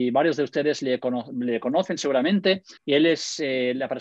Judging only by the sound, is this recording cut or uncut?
cut